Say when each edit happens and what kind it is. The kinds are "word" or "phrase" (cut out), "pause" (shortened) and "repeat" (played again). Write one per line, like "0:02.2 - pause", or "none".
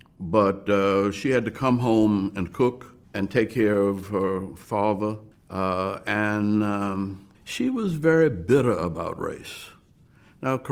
0:03.0 - pause
0:05.3 - pause
0:07.3 - pause